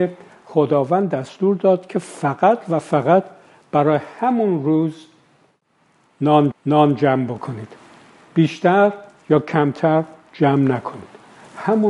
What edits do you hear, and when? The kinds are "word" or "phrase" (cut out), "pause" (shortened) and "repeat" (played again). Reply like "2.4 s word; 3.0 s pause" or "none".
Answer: 6.5 s repeat